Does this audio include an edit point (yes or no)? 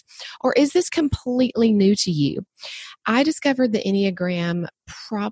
no